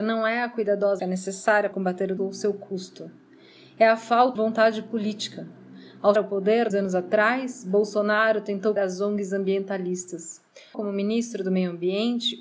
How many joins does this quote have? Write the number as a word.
eight